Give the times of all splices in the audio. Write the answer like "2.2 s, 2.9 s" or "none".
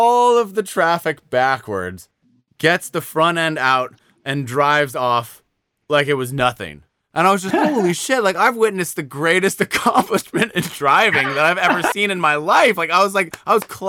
6.9 s, 7.5 s